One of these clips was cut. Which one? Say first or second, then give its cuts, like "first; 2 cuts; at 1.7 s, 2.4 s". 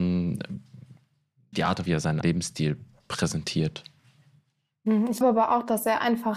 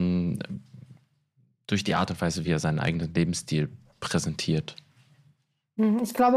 first; 4 cuts; at 1.5 s, 1.9 s, 2.2 s, 5.2 s